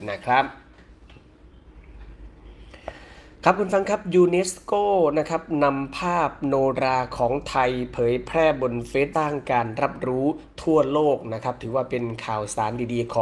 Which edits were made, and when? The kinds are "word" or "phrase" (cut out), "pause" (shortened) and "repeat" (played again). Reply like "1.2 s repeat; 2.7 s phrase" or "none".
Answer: 9.1 s phrase